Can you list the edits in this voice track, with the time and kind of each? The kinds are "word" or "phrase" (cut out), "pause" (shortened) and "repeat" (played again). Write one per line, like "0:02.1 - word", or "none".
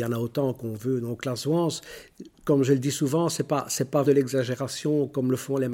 0:04.0 - word